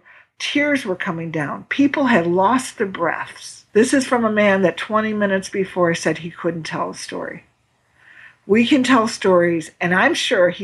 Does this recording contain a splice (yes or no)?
yes